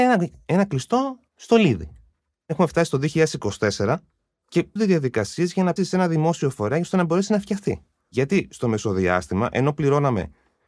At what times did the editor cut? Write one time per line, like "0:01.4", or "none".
0:04.8
0:05.8